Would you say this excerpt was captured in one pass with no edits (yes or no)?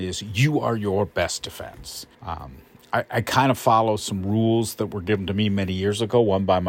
no